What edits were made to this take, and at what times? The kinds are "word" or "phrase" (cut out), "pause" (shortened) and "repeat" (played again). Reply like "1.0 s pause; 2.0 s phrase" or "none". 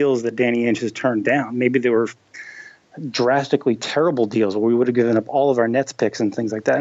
none